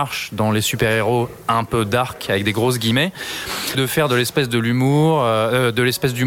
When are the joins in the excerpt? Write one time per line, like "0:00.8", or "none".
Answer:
0:03.7